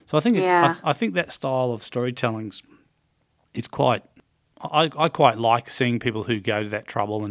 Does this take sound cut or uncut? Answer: uncut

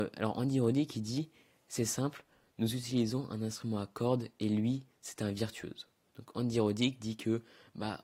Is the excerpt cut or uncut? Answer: uncut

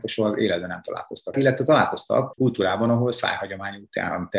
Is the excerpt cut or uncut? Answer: cut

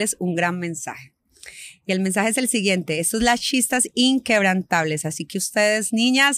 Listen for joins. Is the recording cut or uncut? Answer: uncut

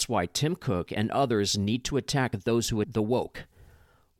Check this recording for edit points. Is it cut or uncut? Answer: cut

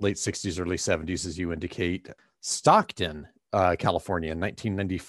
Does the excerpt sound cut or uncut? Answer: uncut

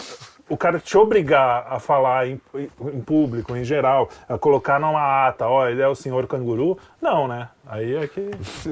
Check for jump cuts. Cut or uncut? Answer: uncut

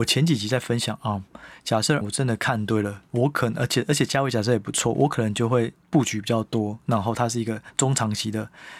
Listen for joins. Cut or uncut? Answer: cut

